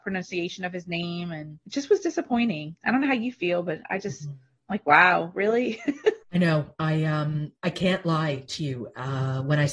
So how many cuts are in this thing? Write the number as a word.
two